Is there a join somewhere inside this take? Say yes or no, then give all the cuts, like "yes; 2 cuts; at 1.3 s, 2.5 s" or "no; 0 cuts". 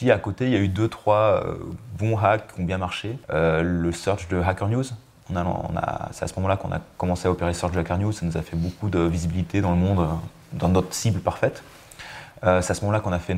yes; 1 cut; at 3.2 s